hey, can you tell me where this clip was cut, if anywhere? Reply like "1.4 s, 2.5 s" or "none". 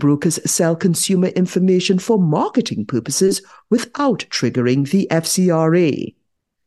none